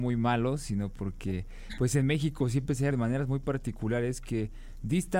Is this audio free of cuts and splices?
no; 1 cut; at 2.9 s

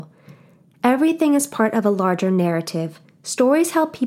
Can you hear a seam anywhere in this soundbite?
yes; 1 cut; at 3.0 s

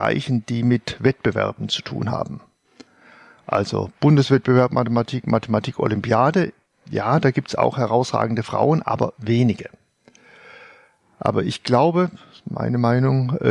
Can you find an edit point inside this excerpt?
no; 0 cuts

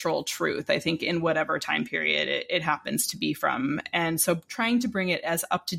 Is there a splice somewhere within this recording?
no; 0 cuts

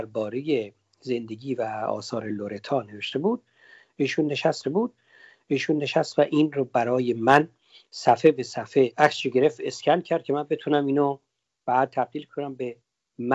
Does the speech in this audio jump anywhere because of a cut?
yes; 1 cut; at 4.6 s

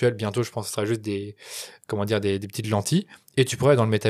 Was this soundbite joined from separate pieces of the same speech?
no; 0 cuts

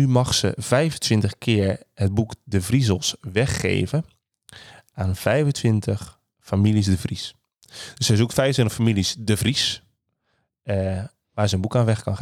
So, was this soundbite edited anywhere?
no; 0 cuts

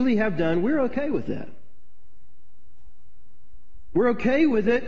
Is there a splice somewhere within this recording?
no; 0 cuts

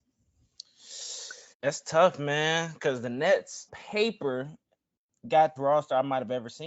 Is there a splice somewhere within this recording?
yes; 3 cuts; at 1.5 s, 3.7 s, 5.6 s

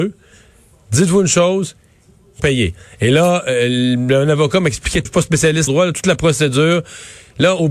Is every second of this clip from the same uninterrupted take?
no; 3 cuts; at 2.4 s, 5.0 s, 5.7 s

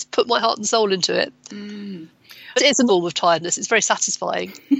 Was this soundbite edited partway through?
yes; 2 cuts; at 2.6 s, 2.9 s

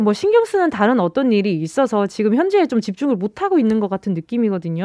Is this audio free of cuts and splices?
yes; 0 cuts

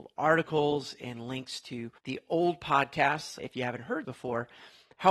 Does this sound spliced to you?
yes; 3 cuts; at 2.0 s, 3.4 s, 4.0 s

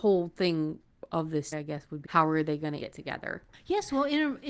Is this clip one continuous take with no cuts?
no; 3 cuts; at 1.5 s, 2.0 s, 2.8 s

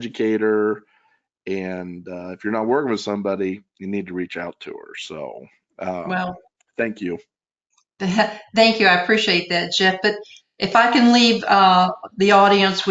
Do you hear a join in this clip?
no; 0 cuts

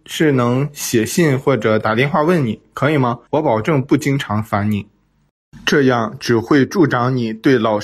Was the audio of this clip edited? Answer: yes; 1 cut; at 3.3 s

